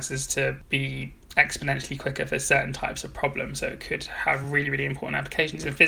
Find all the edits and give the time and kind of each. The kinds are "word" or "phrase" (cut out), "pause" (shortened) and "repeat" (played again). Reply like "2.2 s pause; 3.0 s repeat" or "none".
none

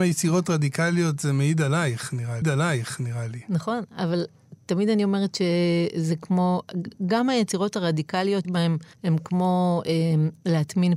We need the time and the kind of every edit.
2.4 s repeat; 8.4 s phrase; 8.9 s pause

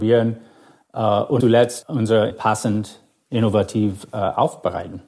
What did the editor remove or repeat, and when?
1.4 s word; 2.3 s word

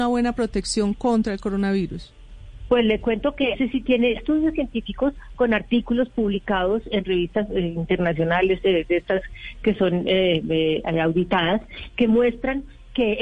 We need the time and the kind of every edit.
3.5 s word; 4.2 s word

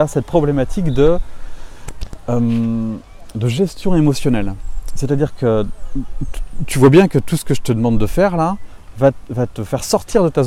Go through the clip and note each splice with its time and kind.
none

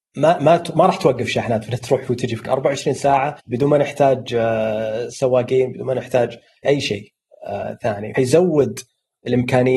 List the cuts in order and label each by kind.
2.5 s word; 3.4 s pause; 6.6 s word; 8.2 s word

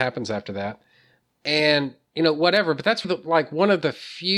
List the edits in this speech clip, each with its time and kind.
3.0 s word

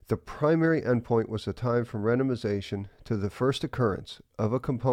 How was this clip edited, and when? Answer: none

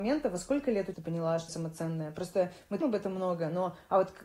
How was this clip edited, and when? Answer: 0.9 s phrase; 1.5 s word; 2.8 s word

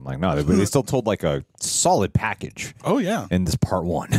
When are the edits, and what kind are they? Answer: none

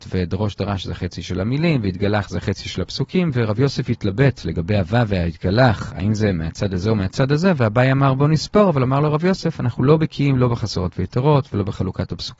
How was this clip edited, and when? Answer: none

